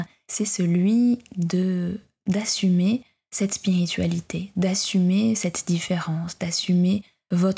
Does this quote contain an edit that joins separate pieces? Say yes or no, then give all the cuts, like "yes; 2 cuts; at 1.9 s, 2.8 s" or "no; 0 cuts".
no; 0 cuts